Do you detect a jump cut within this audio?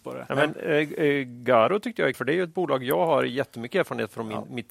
yes; 1 cut; at 2.1 s

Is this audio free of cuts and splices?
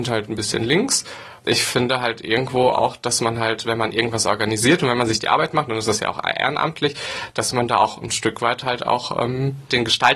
yes; 0 cuts

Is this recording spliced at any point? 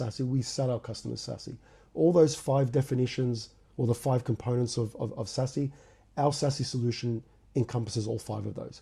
no; 0 cuts

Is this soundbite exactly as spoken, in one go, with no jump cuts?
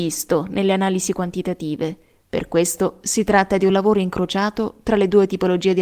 yes; 0 cuts

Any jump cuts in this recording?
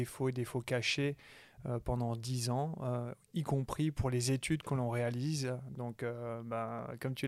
no; 0 cuts

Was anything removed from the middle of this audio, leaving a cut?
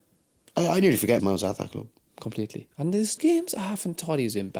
yes; 3 cuts; at 1.2 s, 2.7 s, 3.2 s

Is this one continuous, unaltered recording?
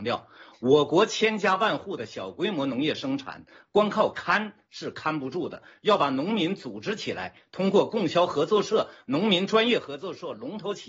yes; 0 cuts

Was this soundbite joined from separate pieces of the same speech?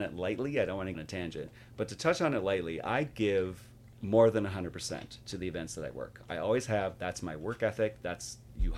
yes; 2 cuts; at 0.9 s, 3.9 s

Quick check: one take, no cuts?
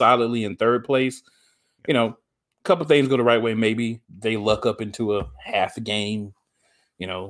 no; 1 cut; at 4.0 s

